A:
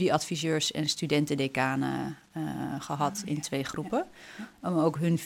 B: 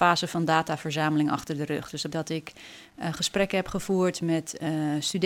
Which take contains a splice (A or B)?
B